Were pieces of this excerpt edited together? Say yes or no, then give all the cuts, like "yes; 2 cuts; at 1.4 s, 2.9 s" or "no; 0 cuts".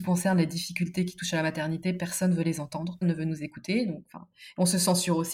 yes; 1 cut; at 3.0 s